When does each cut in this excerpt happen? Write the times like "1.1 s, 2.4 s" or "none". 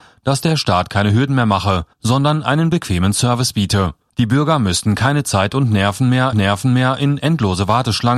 1.9 s, 4.1 s, 6.3 s